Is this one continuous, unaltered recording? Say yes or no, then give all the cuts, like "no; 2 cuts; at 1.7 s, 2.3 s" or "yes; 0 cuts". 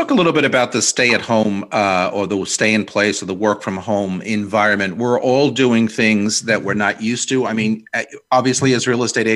yes; 0 cuts